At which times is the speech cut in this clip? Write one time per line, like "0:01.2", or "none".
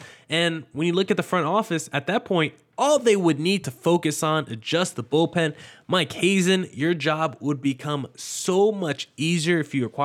none